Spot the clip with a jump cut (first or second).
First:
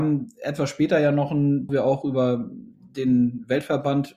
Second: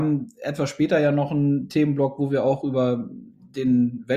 first